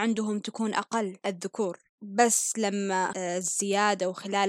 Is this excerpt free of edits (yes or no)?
no